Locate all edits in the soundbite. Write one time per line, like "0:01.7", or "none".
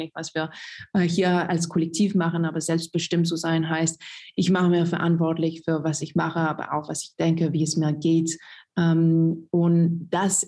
none